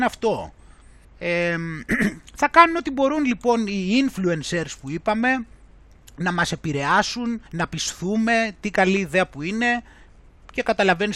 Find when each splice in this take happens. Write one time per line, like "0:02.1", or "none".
0:01.0
0:07.5